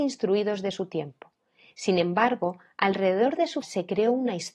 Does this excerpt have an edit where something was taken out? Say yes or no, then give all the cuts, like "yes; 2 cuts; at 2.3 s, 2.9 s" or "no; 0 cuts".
yes; 1 cut; at 3.6 s